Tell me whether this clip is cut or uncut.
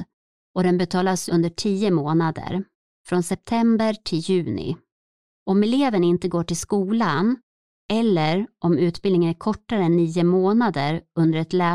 cut